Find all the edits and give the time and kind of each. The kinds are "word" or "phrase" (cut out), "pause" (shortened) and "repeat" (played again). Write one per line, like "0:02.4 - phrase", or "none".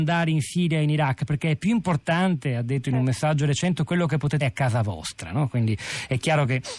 0:04.4 - word